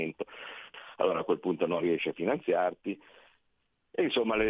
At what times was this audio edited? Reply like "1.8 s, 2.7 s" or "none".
none